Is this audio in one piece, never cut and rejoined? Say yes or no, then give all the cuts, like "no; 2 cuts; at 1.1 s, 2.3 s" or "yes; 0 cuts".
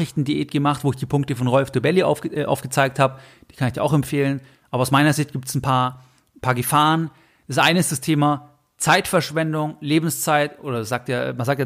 yes; 0 cuts